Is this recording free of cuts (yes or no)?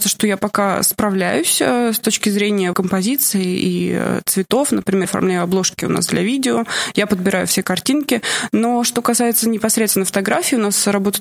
no